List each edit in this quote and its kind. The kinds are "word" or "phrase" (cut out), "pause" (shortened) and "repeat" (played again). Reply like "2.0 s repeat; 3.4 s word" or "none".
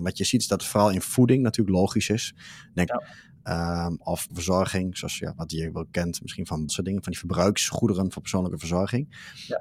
2.9 s phrase; 4.3 s word; 6.7 s phrase